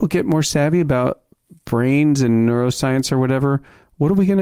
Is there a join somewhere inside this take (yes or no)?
no